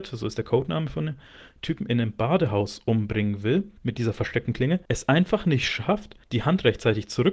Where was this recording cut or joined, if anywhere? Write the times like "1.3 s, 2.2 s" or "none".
3.8 s, 4.8 s, 6.2 s